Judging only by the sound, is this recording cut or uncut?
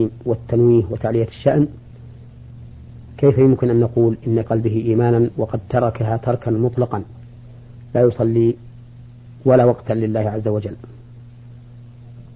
cut